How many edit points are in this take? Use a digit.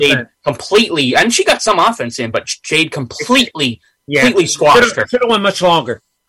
0